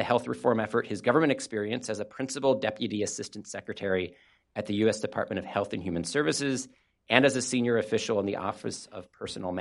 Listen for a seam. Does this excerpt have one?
no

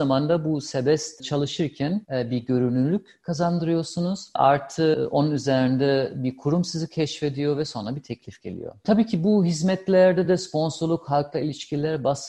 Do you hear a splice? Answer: no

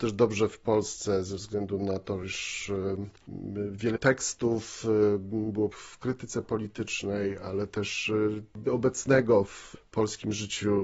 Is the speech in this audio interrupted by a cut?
yes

